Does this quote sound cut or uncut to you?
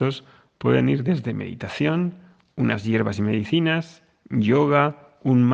uncut